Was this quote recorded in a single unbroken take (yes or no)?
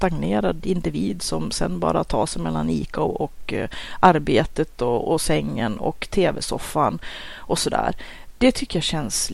yes